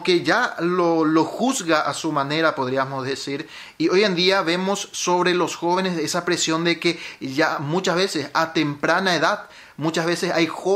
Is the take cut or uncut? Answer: uncut